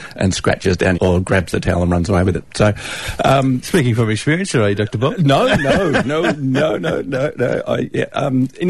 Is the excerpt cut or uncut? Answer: cut